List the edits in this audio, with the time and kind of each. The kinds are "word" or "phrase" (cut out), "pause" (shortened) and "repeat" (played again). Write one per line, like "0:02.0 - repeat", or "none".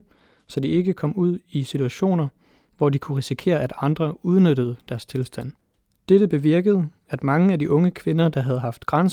none